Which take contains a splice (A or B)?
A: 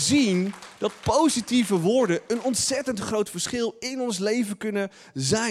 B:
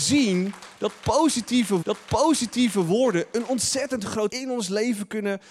B